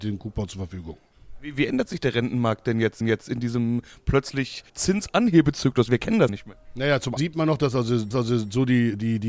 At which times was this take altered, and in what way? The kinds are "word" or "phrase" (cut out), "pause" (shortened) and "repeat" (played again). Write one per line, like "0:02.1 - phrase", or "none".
0:03.0 - repeat
0:04.7 - pause
0:06.3 - phrase
0:07.2 - word
0:08.1 - repeat